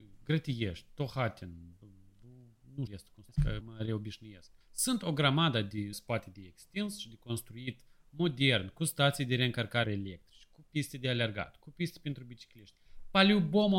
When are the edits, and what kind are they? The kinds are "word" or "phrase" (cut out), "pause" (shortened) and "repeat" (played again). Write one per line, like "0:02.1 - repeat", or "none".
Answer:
0:02.9 - word
0:03.3 - pause
0:03.6 - word
0:04.6 - pause
0:05.9 - phrase
0:09.8 - phrase